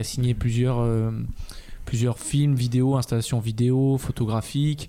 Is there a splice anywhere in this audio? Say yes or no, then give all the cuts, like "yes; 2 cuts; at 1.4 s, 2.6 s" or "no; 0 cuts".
no; 0 cuts